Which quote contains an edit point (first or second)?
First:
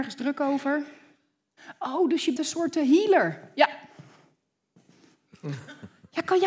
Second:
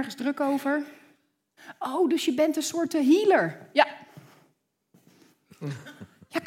first